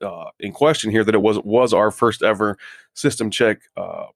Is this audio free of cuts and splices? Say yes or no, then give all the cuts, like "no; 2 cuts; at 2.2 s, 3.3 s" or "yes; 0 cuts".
yes; 0 cuts